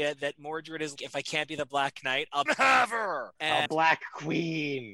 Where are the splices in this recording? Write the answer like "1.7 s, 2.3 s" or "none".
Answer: 1.0 s, 2.5 s, 3.7 s